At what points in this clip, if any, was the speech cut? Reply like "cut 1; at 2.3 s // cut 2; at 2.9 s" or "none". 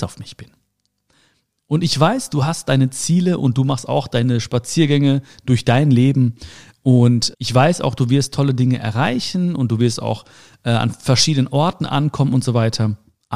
cut 1; at 7.3 s